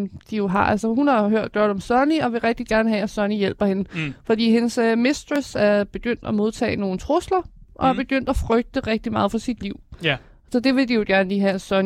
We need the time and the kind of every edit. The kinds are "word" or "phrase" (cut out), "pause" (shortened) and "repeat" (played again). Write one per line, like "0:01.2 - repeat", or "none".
none